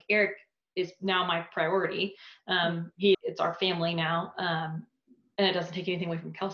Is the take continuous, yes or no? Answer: no